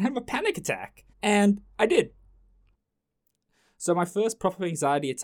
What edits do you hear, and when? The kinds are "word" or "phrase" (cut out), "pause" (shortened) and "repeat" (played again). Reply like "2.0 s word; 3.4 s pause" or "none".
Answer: 1.1 s pause